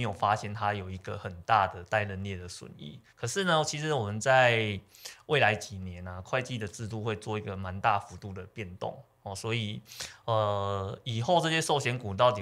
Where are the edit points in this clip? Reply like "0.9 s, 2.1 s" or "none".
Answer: 3.1 s

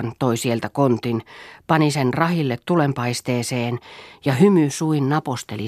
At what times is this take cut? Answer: none

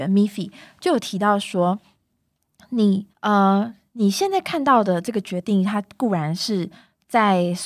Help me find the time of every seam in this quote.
3.1 s

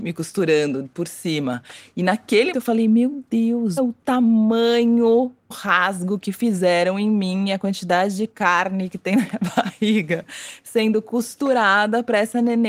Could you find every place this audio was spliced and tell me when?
2.5 s, 3.8 s, 5.5 s

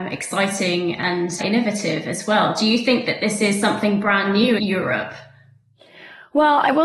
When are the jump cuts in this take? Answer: 1.4 s, 4.6 s

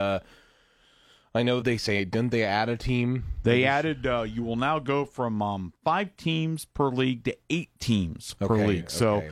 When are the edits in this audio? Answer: 1.6 s

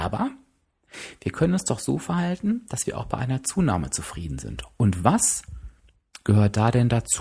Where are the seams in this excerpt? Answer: none

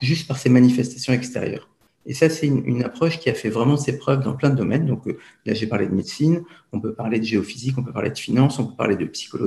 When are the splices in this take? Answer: none

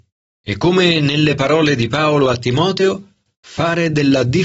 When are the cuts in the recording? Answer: none

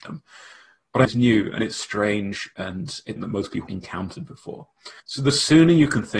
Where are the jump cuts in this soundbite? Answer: 1.0 s, 3.2 s, 3.7 s, 5.0 s

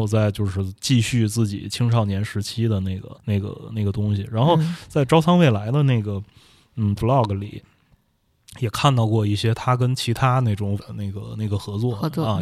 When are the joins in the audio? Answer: 3.2 s, 7.0 s, 10.8 s

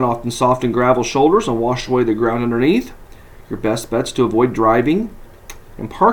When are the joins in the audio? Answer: none

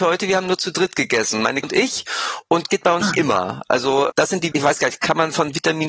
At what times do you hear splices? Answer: 1.6 s, 2.7 s, 3.0 s, 4.1 s, 4.5 s

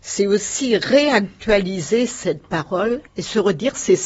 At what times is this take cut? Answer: 3.1 s

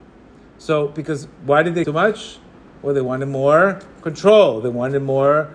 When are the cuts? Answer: 1.8 s

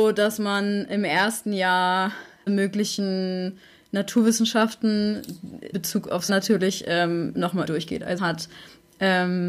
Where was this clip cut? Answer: 2.5 s, 5.7 s, 6.3 s, 7.6 s, 8.2 s

